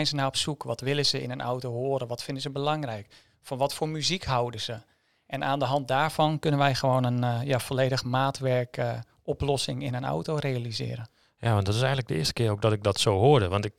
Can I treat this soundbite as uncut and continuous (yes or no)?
yes